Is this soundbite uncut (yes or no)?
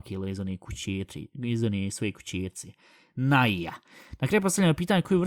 yes